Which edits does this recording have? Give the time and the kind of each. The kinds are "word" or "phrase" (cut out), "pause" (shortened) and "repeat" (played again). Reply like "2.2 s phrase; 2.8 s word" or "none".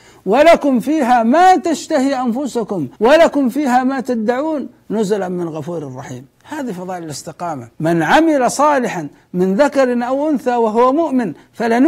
3.0 s pause; 7.7 s pause